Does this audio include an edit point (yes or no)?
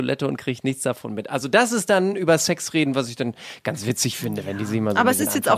no